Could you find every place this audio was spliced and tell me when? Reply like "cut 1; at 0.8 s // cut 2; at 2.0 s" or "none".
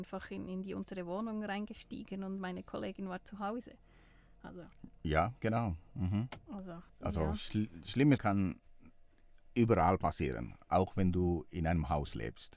cut 1; at 6.9 s // cut 2; at 8.2 s